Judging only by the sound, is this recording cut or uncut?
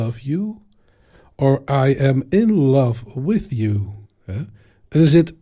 cut